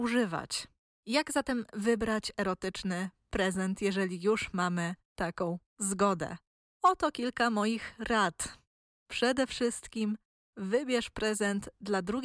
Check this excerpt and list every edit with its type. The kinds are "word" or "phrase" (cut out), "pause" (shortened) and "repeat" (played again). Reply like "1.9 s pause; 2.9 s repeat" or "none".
none